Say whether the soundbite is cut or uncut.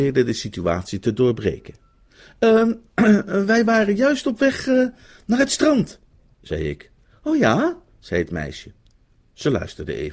uncut